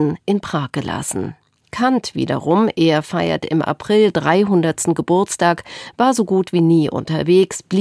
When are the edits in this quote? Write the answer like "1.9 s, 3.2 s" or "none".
none